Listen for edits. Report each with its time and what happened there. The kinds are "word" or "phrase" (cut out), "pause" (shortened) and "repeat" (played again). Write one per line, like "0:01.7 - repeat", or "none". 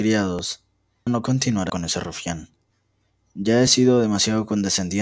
0:01.1 - word
0:01.7 - word

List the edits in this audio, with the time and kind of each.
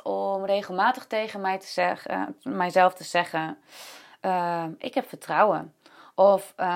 none

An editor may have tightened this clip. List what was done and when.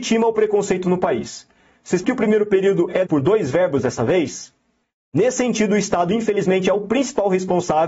0:02.0 - word
0:03.0 - word
0:04.8 - pause

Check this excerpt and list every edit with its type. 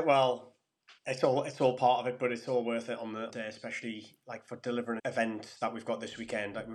0:01.0 - pause
0:03.3 - phrase
0:05.0 - phrase

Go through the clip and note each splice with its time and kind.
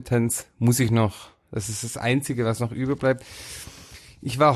none

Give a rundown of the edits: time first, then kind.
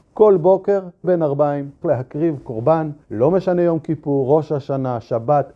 0:01.0 - word
0:01.8 - word
0:03.0 - pause

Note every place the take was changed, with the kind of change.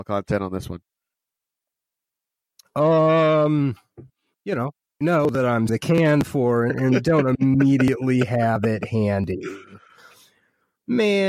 0:05.0 - phrase
0:05.7 - word
0:06.7 - word

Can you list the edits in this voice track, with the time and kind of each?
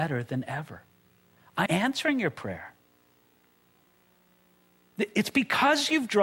0:01.7 - word

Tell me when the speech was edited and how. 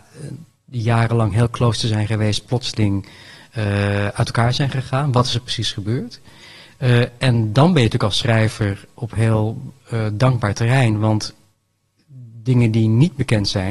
none

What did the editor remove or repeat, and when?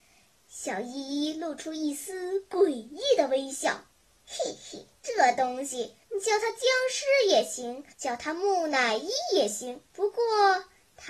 0:03.9 - pause
0:05.0 - pause
0:06.0 - pause
0:07.9 - pause
0:09.9 - pause

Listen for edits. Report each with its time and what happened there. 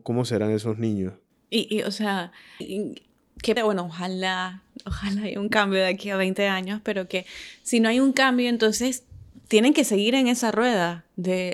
0:02.6 - word
0:03.6 - word

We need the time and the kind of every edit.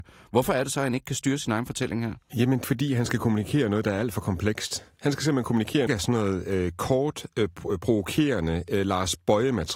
0:02.6 - word
0:05.9 - phrase

